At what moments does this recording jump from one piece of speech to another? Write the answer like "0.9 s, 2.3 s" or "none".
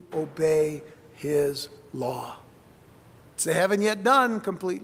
3.4 s